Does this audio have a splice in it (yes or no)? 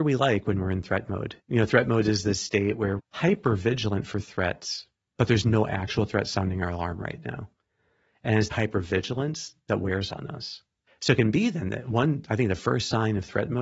yes